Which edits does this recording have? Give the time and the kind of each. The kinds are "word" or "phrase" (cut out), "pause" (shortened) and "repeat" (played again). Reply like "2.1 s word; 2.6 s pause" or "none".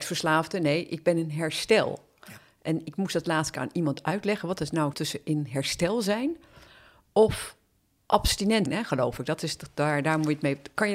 4.9 s word; 8.7 s word